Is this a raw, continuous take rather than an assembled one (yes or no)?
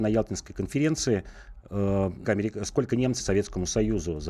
no